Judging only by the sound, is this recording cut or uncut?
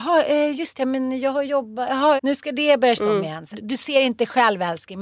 cut